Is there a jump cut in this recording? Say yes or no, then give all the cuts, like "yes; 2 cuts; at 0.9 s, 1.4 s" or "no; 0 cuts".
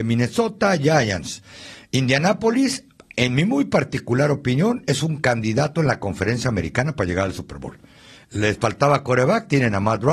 no; 0 cuts